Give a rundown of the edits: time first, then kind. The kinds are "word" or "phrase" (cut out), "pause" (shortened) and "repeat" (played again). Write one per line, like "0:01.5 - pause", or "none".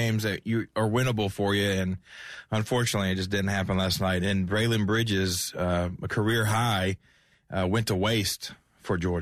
none